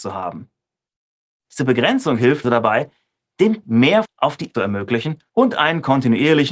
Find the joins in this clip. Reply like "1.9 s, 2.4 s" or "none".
2.4 s, 3.6 s, 4.0 s, 4.5 s, 5.3 s